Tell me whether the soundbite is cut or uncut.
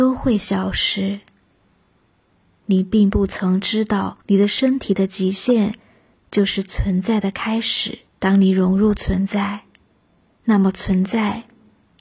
cut